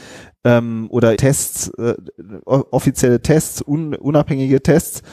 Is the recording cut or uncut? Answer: cut